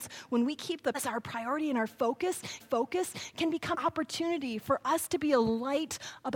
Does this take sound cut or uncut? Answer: cut